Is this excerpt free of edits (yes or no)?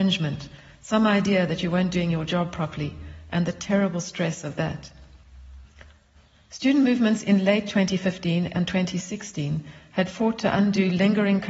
yes